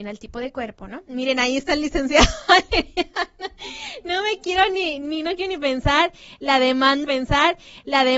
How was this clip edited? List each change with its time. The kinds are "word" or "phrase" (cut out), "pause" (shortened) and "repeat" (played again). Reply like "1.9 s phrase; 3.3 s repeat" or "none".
7.0 s repeat